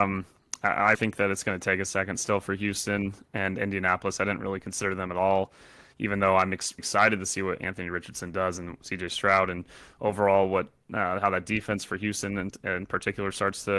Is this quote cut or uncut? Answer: cut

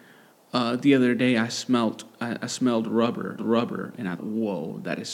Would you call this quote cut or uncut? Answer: cut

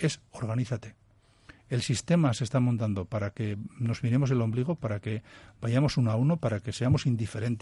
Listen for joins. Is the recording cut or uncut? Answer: uncut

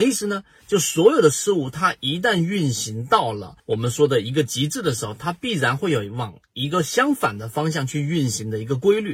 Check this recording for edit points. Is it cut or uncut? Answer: cut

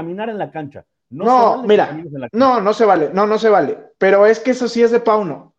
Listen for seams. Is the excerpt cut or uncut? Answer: uncut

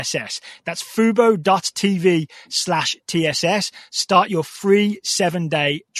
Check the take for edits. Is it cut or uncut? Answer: uncut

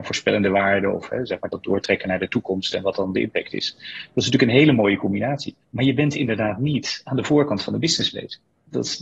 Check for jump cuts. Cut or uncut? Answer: cut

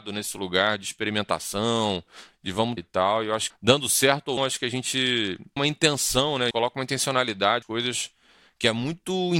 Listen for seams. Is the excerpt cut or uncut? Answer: cut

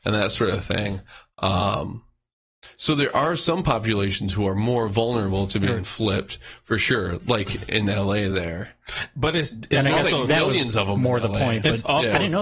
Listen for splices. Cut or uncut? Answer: uncut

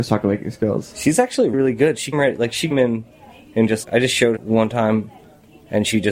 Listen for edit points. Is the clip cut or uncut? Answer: cut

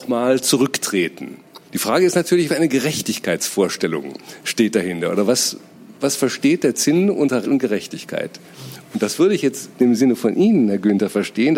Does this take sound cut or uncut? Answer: cut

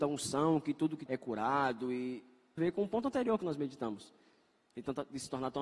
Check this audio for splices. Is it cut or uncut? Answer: cut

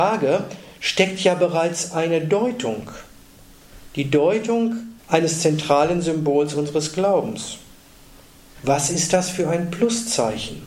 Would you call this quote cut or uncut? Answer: cut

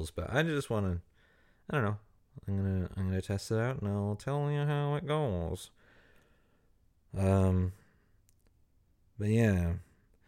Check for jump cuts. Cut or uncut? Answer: uncut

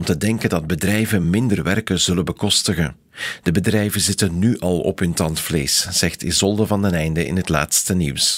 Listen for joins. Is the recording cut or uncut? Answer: uncut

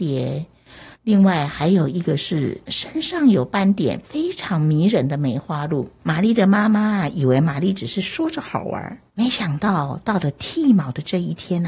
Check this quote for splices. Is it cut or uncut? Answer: cut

